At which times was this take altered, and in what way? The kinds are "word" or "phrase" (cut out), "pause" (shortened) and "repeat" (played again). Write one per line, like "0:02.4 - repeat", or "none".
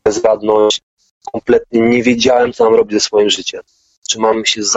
none